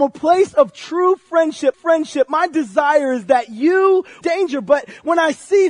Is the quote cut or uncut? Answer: cut